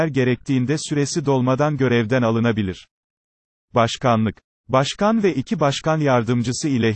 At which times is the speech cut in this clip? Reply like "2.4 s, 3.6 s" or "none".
none